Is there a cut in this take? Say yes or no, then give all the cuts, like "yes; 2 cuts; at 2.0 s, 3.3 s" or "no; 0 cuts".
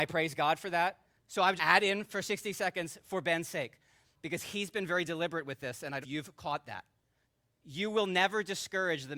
yes; 5 cuts; at 1.1 s, 1.6 s, 4.1 s, 6.0 s, 7.2 s